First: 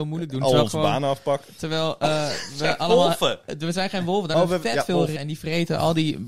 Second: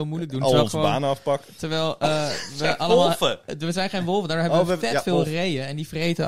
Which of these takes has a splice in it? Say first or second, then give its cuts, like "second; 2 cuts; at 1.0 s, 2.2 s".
first; 2 cuts; at 4.3 s, 5.2 s